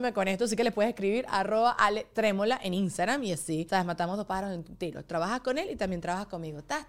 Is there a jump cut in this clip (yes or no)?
no